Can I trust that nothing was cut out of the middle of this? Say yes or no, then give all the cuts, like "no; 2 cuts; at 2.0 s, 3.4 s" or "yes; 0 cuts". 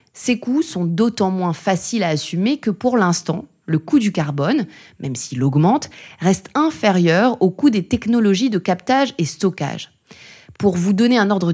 yes; 0 cuts